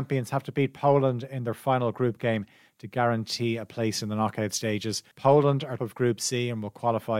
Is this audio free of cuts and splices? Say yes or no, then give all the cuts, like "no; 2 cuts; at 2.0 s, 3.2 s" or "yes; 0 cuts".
no; 2 cuts; at 5.1 s, 5.8 s